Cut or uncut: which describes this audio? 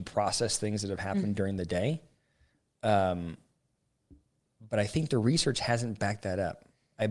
uncut